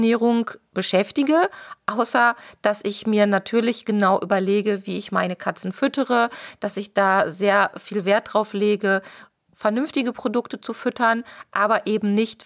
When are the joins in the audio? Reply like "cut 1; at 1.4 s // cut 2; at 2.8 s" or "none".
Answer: none